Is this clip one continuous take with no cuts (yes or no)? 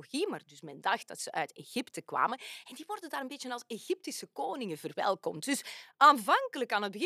yes